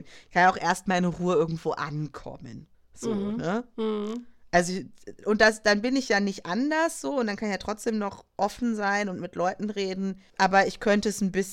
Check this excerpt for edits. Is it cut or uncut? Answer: cut